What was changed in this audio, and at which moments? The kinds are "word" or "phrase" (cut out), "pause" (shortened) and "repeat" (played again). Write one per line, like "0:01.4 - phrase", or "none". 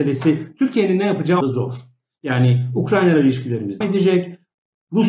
0:01.4 - word
0:03.8 - word